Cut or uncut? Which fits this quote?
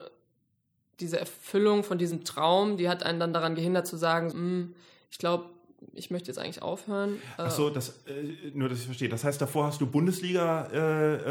cut